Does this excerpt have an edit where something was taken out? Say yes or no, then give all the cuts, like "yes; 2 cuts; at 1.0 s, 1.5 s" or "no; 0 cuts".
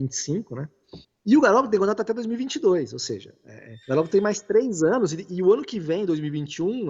yes; 2 cuts; at 1.0 s, 3.8 s